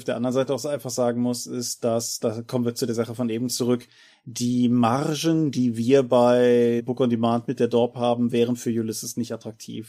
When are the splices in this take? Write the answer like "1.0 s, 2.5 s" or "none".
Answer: none